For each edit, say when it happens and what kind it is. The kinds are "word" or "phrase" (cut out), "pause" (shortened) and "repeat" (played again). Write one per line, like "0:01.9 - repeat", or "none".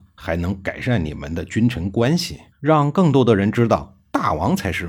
0:02.5 - pause